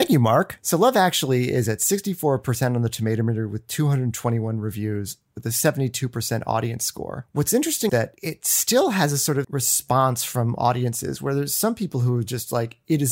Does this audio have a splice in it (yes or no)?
yes